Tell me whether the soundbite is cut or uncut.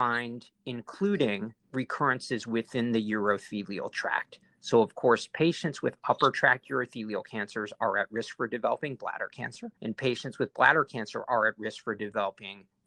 cut